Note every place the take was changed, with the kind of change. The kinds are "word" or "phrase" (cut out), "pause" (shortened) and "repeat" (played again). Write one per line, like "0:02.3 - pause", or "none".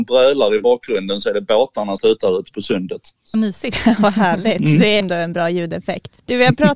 0:02.0 - word
0:03.3 - word
0:05.0 - word